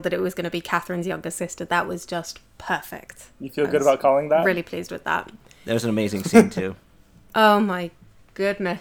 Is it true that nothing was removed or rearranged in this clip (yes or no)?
yes